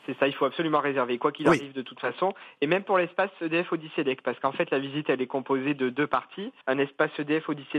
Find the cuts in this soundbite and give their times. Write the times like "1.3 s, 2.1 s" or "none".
6.6 s